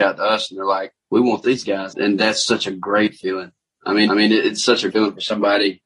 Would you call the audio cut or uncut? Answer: cut